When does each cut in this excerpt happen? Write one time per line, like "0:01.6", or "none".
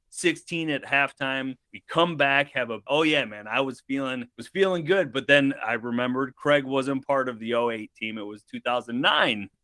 0:01.7
0:02.9
0:04.3